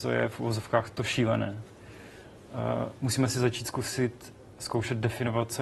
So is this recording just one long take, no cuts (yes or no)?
yes